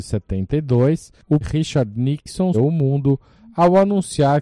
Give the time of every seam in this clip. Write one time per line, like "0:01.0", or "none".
0:01.4
0:02.5